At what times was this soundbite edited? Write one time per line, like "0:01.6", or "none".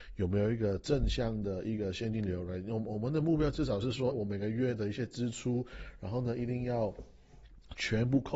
0:04.1